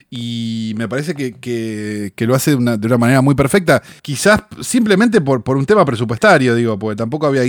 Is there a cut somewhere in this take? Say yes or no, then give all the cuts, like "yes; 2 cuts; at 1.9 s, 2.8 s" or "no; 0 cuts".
yes; 1 cut; at 4.0 s